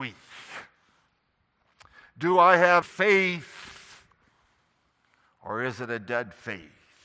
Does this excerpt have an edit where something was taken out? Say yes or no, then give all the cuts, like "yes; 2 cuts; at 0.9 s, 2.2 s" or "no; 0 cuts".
yes; 1 cut; at 2.8 s